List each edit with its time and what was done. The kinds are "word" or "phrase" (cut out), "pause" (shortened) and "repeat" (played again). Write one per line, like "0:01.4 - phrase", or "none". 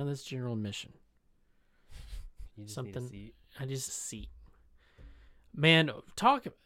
0:03.9 - phrase